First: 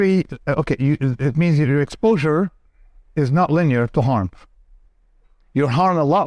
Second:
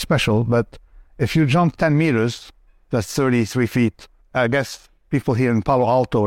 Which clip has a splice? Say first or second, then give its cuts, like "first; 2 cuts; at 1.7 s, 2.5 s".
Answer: second; 1 cut; at 4.2 s